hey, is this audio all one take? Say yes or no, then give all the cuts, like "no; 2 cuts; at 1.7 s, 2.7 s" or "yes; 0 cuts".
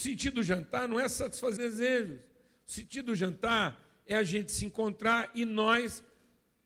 no; 1 cut; at 1.6 s